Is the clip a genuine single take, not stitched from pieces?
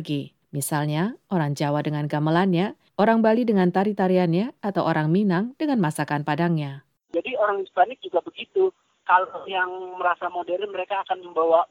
yes; 0 cuts

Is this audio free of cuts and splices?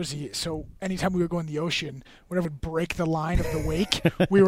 no; 1 cut; at 2.4 s

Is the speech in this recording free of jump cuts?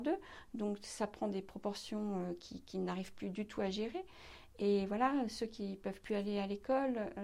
yes; 0 cuts

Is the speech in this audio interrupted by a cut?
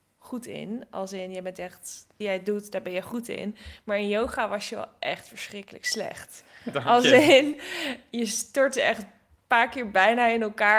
yes; 1 cut; at 2.2 s

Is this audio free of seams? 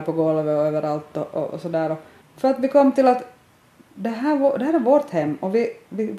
yes; 0 cuts

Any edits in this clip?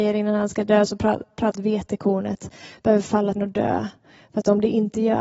yes; 2 cuts; at 1.5 s, 3.4 s

